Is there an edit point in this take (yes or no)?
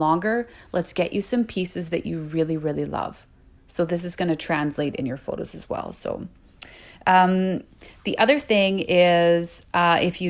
no